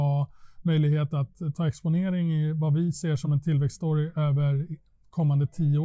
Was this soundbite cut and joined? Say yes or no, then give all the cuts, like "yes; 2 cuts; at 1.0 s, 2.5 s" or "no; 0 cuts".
no; 0 cuts